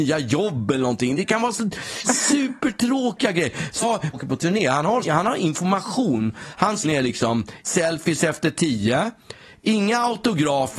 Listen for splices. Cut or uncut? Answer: cut